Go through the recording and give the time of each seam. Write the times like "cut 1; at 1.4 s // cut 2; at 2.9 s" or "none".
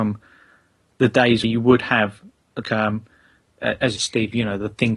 cut 1; at 1.4 s // cut 2; at 2.6 s // cut 3; at 4.0 s